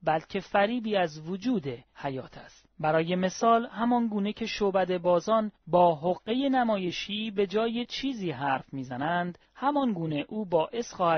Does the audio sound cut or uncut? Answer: uncut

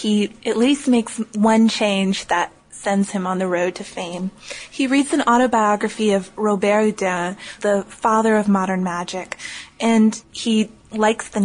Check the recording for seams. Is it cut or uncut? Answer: cut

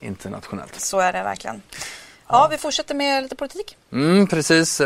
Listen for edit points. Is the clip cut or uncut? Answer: uncut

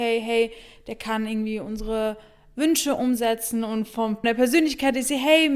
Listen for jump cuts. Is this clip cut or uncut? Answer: cut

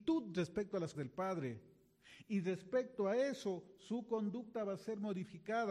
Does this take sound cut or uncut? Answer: cut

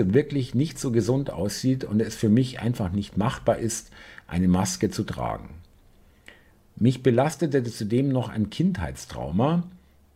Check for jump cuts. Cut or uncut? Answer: uncut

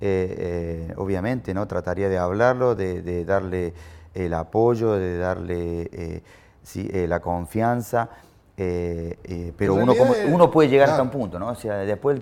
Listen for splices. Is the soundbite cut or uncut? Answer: uncut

